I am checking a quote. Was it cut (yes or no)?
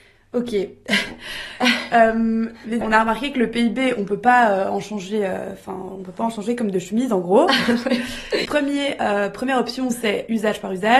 yes